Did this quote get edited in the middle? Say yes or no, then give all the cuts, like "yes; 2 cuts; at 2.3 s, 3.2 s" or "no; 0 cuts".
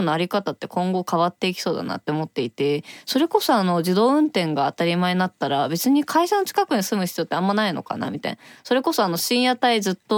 no; 0 cuts